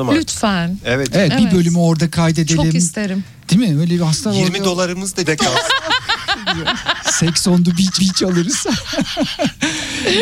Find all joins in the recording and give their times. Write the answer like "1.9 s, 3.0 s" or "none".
3.4 s, 5.2 s, 8.0 s